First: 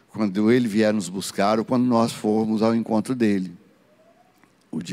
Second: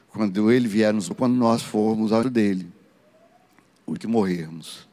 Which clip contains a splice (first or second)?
second